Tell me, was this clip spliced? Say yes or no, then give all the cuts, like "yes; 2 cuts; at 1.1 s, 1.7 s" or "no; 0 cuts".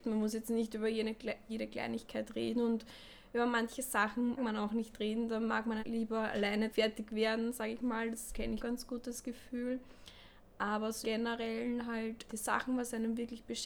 yes; 7 cuts; at 1.5 s, 4.4 s, 5.8 s, 6.7 s, 8.6 s, 11.0 s, 12.3 s